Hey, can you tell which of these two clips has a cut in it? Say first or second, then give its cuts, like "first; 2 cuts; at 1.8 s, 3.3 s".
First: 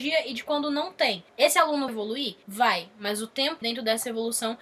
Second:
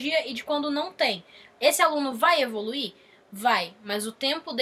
first; 4 cuts; at 1.3 s, 1.9 s, 2.4 s, 3.6 s